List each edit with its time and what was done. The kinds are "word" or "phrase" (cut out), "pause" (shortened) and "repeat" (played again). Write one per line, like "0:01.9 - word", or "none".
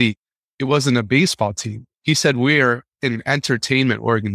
0:01.9 - pause